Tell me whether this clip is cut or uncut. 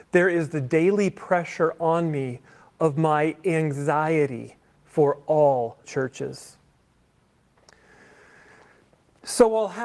cut